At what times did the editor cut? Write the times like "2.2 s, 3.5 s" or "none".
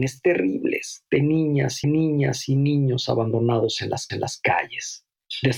1.8 s, 4.1 s

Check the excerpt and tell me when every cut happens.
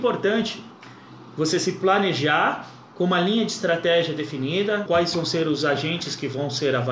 4.9 s

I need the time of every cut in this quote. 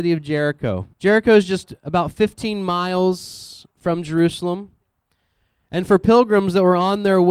0.9 s, 3.7 s

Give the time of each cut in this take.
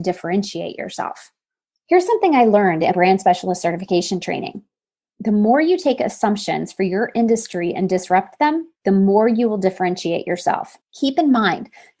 2.9 s, 8.7 s, 10.8 s

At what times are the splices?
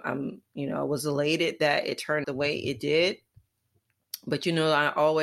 2.2 s

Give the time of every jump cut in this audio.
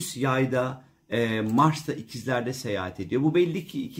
none

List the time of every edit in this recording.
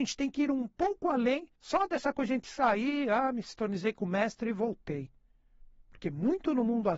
1.6 s

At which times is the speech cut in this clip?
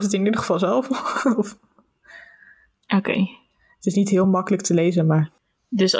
none

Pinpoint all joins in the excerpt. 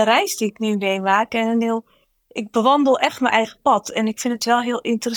none

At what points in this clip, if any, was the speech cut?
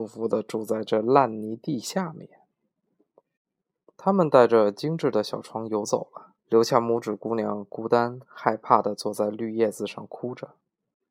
6.4 s

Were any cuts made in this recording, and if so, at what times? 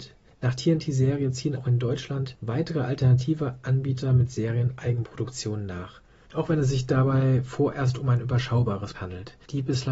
1.6 s, 8.9 s

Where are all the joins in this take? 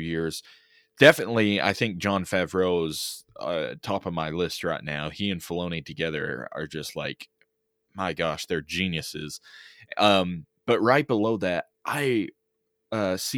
none

